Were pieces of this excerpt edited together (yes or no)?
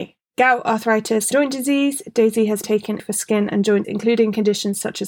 yes